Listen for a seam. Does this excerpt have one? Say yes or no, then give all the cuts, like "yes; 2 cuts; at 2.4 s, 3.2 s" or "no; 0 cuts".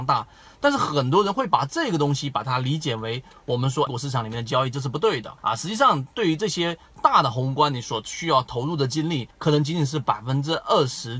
yes; 3 cuts; at 3.9 s, 5.4 s, 9.3 s